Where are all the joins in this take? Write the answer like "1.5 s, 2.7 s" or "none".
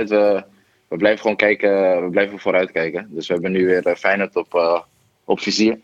none